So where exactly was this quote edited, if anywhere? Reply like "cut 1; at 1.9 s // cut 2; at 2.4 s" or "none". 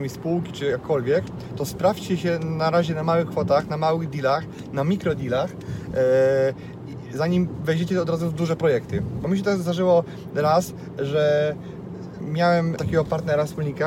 cut 1; at 12.8 s